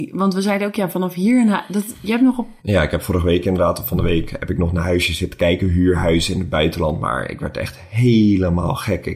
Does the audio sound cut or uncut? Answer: cut